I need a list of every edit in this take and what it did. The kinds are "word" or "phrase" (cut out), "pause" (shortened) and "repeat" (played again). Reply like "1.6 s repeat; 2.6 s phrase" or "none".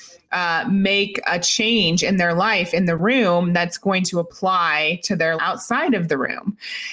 5.4 s word